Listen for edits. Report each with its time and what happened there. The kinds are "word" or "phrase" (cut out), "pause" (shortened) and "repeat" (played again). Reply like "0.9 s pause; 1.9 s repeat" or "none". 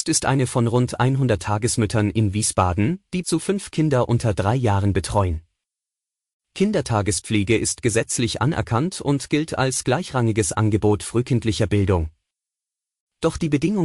3.2 s word